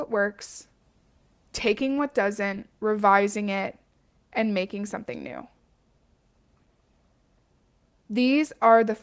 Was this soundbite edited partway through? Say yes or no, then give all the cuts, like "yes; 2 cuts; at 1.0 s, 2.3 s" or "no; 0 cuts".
no; 0 cuts